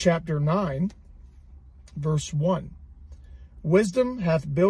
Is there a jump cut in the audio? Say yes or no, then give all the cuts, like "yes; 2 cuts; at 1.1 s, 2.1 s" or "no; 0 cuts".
no; 0 cuts